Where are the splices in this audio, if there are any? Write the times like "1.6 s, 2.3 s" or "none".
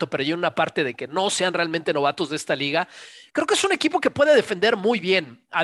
none